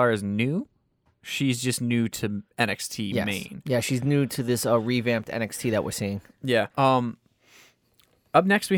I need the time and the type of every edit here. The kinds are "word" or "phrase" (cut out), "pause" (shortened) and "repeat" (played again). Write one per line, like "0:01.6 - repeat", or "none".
0:02.5 - pause
0:06.7 - pause